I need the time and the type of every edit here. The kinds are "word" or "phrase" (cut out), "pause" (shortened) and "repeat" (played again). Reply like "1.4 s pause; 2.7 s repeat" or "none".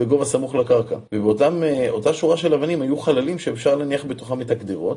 1.1 s pause

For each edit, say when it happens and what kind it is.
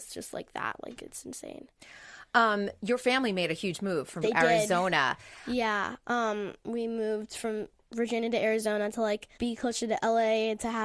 4.2 s phrase; 9.3 s pause

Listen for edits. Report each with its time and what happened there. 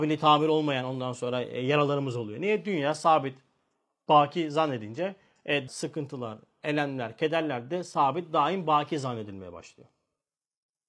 5.7 s word

